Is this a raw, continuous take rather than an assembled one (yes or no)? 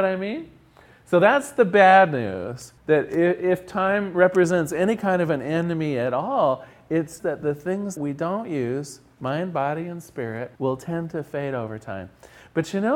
no